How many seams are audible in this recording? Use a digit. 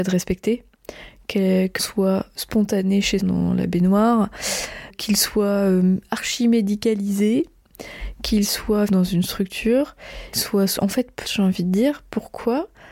7